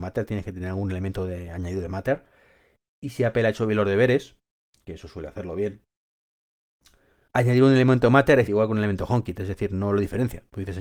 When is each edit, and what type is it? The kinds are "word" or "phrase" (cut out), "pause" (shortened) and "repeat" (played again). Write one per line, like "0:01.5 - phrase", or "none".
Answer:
0:07.3 - word
0:08.5 - word